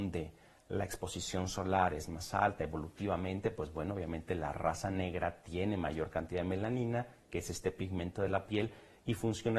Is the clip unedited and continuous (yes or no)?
yes